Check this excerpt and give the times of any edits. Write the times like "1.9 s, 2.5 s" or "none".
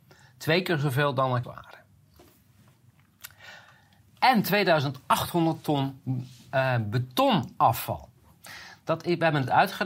1.4 s